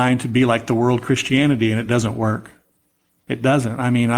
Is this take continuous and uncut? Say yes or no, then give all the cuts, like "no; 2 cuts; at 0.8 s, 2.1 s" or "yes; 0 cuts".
yes; 0 cuts